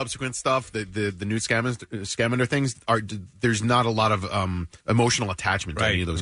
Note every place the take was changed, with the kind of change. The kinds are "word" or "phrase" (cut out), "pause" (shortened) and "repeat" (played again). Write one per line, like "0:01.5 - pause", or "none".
0:04.8 - pause